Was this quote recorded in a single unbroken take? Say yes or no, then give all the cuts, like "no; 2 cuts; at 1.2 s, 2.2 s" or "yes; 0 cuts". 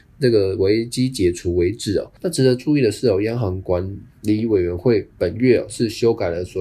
no; 1 cut; at 2.2 s